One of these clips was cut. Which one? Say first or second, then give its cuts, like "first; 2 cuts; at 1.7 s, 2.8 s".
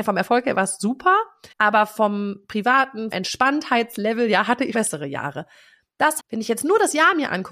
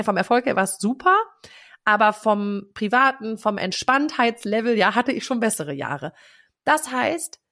first; 4 cuts; at 1.5 s, 3.1 s, 4.7 s, 6.2 s